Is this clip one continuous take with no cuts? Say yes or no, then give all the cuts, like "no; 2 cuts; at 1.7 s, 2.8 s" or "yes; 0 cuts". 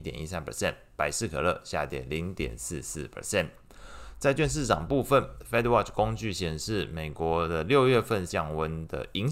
no; 1 cut; at 8.3 s